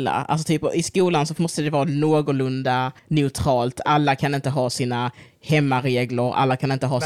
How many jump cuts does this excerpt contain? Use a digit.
1